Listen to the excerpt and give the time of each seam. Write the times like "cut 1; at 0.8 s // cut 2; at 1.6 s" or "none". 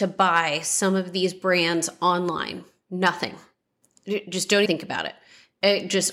cut 1; at 4.7 s